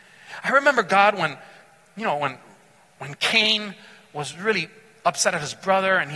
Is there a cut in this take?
no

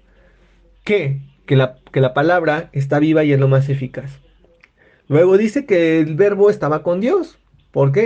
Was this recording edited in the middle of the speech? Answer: no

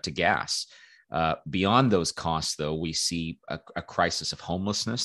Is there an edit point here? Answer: no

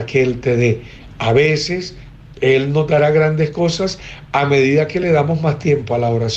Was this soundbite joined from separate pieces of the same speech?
no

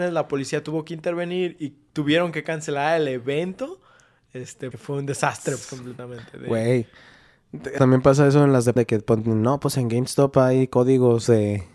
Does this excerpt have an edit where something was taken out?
yes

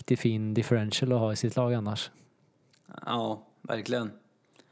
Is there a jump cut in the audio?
no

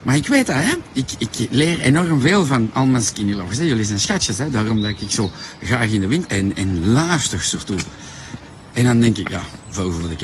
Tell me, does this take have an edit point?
yes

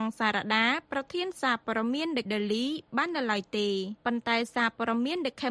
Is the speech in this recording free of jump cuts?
no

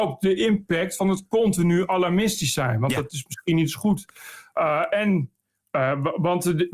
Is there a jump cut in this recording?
no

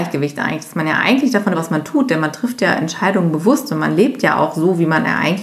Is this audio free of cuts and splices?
no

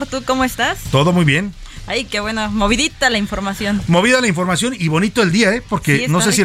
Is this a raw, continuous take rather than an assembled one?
yes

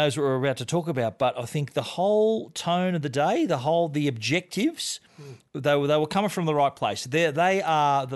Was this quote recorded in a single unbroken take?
yes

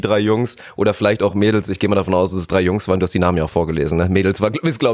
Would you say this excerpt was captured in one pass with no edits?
yes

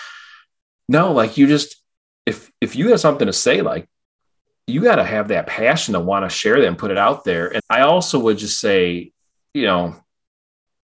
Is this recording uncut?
no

